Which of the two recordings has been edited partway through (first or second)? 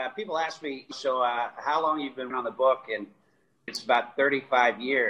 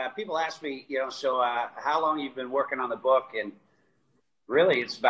first